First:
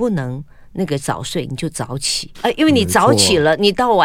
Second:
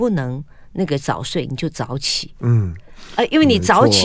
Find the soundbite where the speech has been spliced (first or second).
first